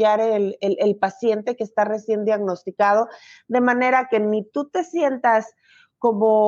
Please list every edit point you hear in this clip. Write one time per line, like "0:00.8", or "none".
none